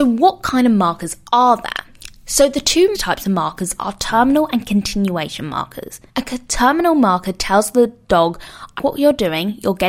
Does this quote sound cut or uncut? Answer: cut